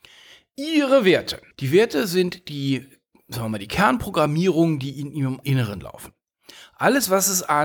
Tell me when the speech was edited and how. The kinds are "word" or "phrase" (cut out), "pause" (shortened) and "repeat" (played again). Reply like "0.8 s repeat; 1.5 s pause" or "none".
1.5 s pause; 5.4 s word